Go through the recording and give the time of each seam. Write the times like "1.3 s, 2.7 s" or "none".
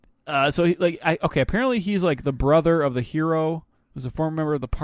3.7 s